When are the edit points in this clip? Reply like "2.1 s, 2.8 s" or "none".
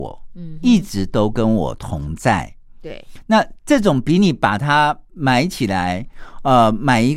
none